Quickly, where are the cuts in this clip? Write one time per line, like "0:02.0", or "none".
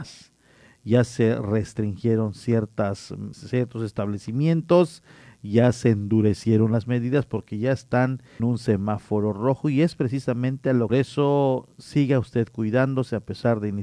0:03.3
0:08.4
0:10.9